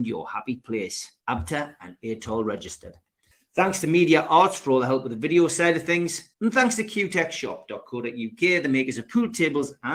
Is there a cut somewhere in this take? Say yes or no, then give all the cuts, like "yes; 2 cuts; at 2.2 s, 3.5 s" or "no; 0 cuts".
yes; 3 cuts; at 1.2 s, 3.3 s, 6.3 s